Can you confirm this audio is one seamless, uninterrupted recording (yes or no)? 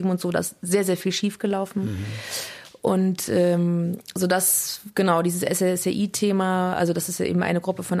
yes